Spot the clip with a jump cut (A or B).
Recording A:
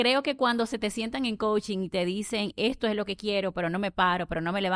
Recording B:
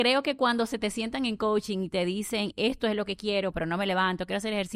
B